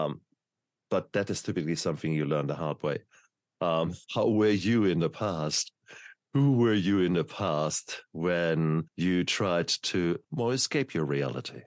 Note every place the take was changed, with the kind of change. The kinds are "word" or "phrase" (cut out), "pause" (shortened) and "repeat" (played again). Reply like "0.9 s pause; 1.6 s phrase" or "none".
4.0 s pause; 8.9 s pause; 10.2 s pause